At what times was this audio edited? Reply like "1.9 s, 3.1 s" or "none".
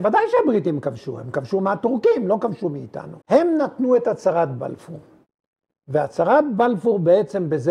3.2 s